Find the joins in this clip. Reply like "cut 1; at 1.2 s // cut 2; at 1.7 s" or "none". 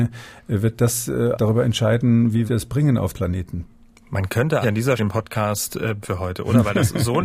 cut 1; at 1.3 s // cut 2; at 2.5 s // cut 3; at 3.1 s // cut 4; at 4.6 s // cut 5; at 5.0 s // cut 6; at 6.0 s